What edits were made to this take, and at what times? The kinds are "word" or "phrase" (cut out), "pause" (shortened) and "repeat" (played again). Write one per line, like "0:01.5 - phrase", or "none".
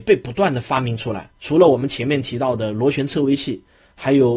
0:01.4 - pause